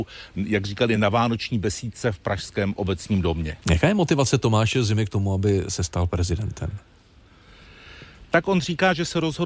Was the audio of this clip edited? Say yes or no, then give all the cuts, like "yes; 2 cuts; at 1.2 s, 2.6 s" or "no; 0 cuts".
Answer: no; 0 cuts